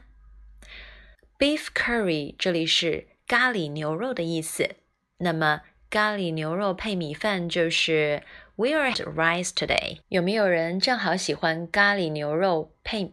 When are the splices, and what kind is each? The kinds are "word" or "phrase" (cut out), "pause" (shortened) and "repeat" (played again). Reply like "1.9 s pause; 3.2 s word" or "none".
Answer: 1.1 s pause; 8.9 s phrase; 10.0 s pause